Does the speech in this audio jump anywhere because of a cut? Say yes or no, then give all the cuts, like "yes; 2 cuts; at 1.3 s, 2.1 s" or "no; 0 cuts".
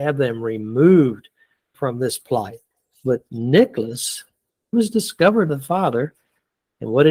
yes; 3 cuts; at 1.7 s, 4.7 s, 5.5 s